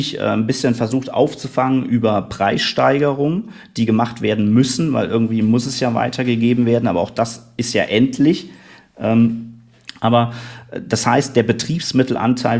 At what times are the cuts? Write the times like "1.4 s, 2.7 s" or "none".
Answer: none